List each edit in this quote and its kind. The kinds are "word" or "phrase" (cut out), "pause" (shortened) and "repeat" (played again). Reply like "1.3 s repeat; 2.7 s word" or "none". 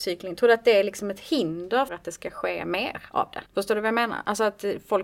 1.9 s word; 3.5 s pause

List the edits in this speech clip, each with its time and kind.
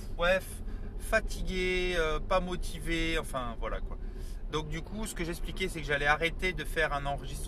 none

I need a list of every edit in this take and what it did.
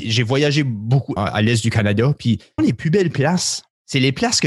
1.2 s word; 2.6 s word

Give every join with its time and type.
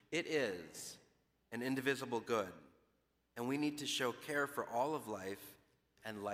none

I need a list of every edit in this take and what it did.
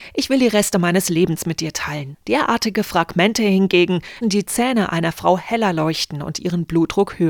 4.2 s word

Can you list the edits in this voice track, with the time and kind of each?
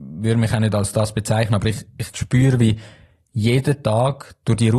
none

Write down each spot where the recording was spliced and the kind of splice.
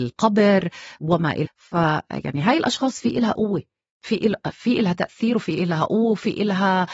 1.4 s word

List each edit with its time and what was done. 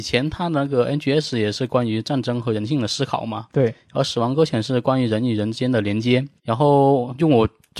6.4 s pause

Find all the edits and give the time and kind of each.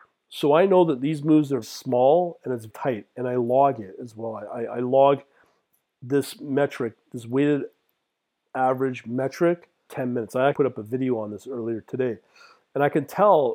1.6 s word; 2.7 s word; 9.9 s word; 10.5 s word

